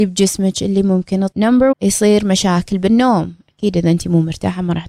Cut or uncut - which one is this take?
cut